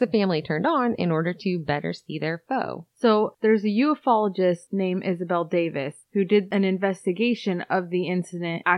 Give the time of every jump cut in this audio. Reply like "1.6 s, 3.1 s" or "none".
6.0 s